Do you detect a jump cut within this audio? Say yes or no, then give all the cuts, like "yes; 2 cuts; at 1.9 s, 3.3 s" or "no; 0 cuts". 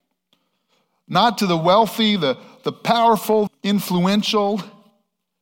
yes; 1 cut; at 3.5 s